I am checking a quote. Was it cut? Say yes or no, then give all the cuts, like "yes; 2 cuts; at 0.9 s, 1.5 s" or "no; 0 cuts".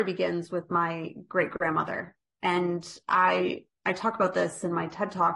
no; 0 cuts